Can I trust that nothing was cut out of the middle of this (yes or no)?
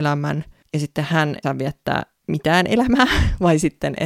no